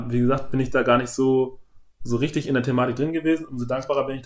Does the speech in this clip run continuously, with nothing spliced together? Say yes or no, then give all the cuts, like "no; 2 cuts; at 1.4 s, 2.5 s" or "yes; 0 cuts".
yes; 0 cuts